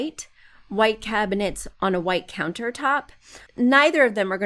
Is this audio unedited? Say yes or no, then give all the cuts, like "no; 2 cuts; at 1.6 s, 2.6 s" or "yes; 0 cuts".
no; 1 cut; at 3.5 s